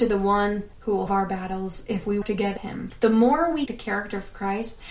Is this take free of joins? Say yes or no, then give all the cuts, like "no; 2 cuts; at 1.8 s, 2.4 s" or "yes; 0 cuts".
no; 4 cuts; at 1.1 s, 2.2 s, 2.6 s, 3.7 s